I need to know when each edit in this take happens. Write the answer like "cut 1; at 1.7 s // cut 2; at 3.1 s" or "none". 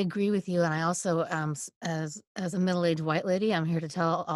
none